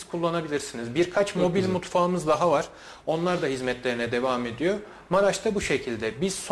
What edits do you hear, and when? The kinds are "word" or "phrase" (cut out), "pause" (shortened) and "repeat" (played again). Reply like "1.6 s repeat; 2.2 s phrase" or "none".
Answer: none